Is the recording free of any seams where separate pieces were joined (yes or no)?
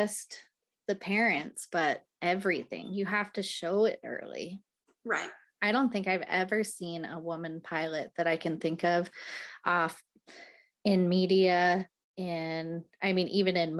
yes